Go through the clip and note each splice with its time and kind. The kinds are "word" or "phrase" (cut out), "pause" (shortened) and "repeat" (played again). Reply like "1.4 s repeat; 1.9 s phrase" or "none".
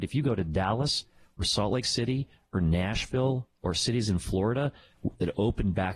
none

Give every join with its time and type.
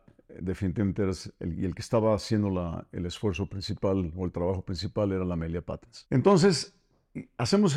6.1 s pause

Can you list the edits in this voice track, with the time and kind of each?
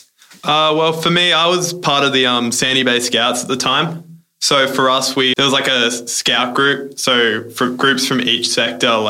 5.3 s word

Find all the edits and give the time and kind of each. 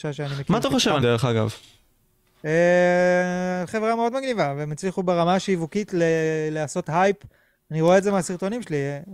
1.0 s word; 3.7 s phrase

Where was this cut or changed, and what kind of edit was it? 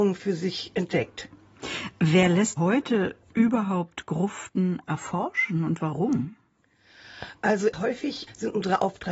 2.6 s word

